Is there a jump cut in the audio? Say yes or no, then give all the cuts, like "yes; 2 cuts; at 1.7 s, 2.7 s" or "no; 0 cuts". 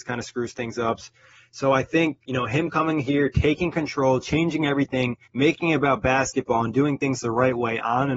yes; 2 cuts; at 2.2 s, 5.2 s